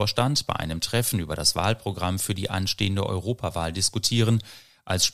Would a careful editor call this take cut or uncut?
uncut